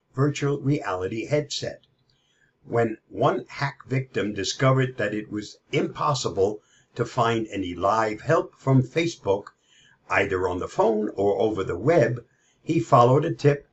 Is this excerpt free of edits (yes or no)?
yes